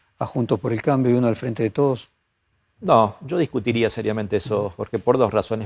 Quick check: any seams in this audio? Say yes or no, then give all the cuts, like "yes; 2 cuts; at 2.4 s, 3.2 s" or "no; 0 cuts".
no; 0 cuts